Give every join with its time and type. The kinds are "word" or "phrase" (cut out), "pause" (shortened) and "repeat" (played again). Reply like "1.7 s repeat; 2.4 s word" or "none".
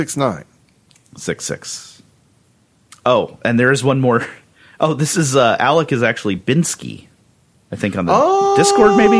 none

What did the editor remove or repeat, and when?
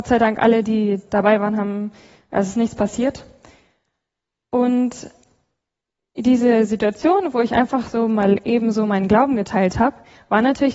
none

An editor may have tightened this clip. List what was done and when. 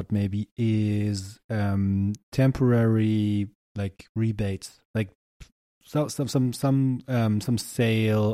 none

